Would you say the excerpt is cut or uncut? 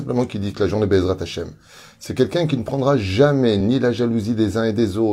uncut